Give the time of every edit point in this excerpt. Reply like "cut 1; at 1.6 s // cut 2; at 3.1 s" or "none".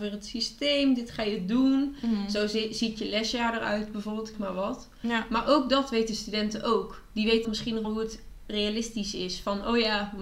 cut 1; at 4.3 s // cut 2; at 7.4 s // cut 3; at 7.8 s